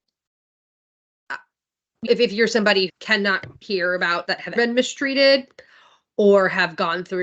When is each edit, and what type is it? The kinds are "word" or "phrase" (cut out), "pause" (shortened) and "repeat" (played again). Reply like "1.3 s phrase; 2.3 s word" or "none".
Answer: 2.0 s word; 2.9 s word; 3.6 s word; 4.3 s word; 4.6 s word